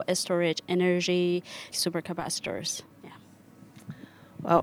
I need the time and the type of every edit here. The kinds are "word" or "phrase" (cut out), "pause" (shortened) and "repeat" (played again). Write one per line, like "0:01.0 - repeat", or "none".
0:01.7 - phrase
0:02.9 - pause